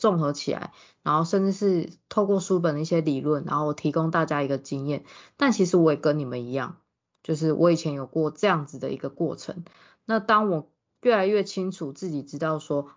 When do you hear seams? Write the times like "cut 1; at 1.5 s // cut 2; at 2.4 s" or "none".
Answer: none

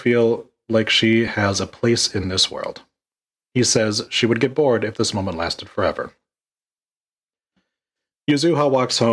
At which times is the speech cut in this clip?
none

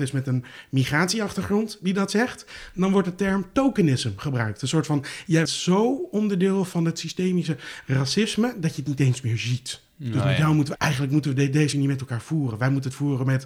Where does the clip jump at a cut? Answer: cut 1; at 5.5 s // cut 2; at 10.8 s // cut 3; at 11.7 s

